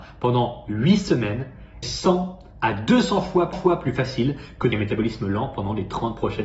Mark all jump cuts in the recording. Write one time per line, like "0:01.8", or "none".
0:01.8
0:03.5
0:04.7